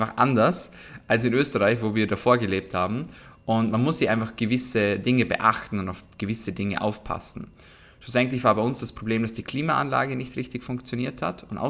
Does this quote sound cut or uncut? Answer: uncut